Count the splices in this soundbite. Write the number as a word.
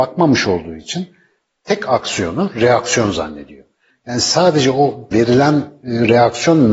one